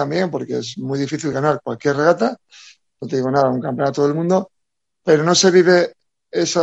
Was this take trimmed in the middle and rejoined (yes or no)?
no